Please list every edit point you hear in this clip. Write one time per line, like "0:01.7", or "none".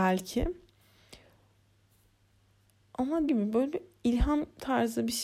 0:03.3

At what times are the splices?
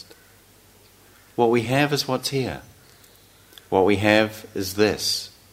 none

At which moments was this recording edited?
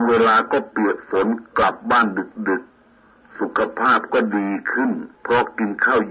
0:02.7
0:05.1

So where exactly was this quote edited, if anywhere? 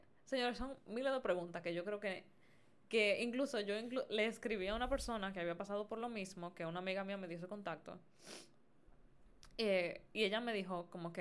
none

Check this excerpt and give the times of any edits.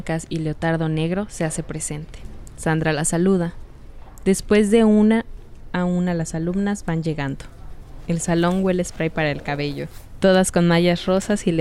none

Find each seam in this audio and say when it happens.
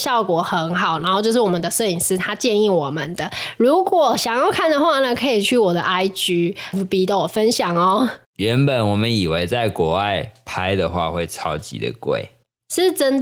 0:06.7
0:08.2

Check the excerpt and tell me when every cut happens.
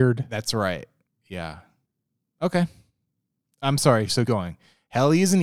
0:04.2

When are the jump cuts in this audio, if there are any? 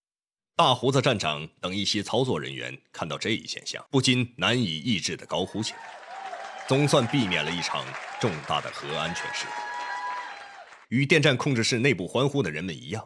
0:03.9
0:10.8

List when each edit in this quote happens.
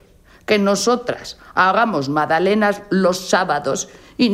none

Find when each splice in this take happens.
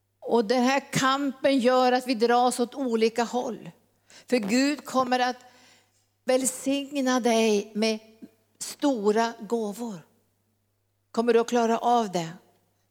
none

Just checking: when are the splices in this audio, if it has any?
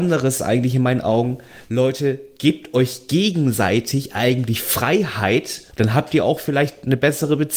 0:05.7

